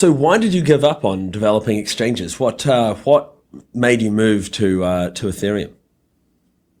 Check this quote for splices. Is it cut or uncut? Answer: uncut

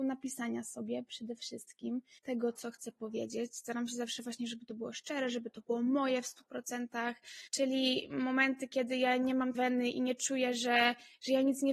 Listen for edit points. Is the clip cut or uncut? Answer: cut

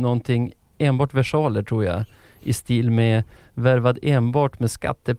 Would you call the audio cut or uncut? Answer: uncut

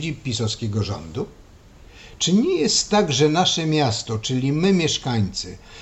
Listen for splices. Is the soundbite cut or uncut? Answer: uncut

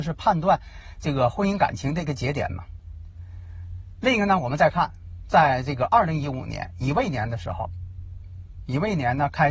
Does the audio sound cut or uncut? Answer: uncut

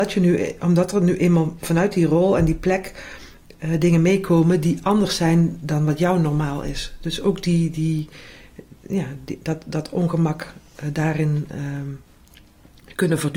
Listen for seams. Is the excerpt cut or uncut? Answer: uncut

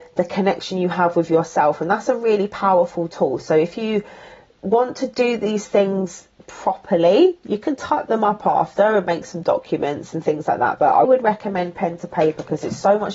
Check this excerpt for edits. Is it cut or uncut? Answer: cut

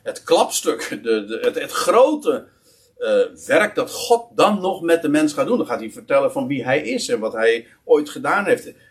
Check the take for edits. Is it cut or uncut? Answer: uncut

